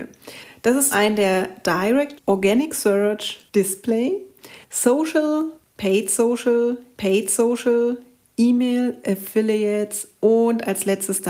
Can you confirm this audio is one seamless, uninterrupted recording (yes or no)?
no